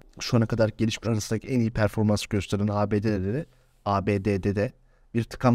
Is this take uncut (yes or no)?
no